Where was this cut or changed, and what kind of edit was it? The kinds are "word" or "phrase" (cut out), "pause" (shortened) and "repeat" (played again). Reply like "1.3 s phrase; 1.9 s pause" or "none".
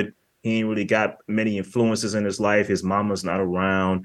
none